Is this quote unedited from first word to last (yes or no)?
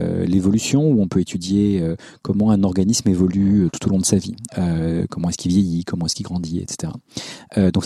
yes